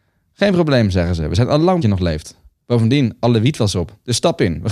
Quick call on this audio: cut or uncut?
cut